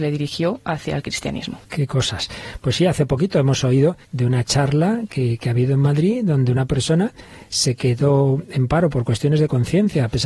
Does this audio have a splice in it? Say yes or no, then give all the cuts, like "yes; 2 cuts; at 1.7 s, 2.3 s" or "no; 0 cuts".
yes; 1 cut; at 4.0 s